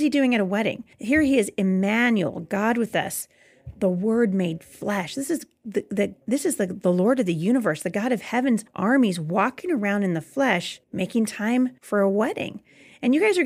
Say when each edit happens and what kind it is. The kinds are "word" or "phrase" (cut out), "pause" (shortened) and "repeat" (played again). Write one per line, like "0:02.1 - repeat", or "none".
0:00.9 - pause
0:06.2 - pause
0:08.7 - pause
0:10.8 - pause
0:11.8 - pause